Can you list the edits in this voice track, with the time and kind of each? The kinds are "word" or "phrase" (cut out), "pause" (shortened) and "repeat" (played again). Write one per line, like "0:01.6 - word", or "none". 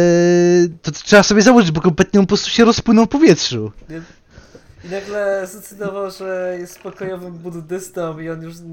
none